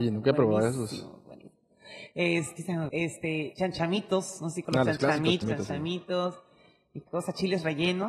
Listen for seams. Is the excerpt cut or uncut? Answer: cut